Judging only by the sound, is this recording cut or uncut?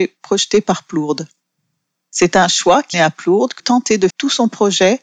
cut